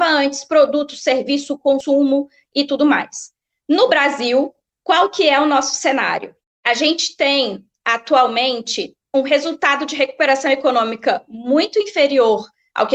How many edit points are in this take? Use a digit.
0